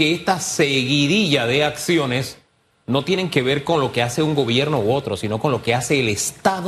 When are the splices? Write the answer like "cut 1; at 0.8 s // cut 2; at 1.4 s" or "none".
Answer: none